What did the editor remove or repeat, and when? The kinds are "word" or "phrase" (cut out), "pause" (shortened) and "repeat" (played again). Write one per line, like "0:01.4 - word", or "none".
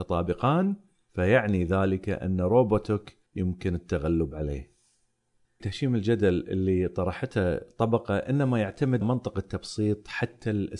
0:03.3 - pause
0:05.6 - phrase
0:09.0 - word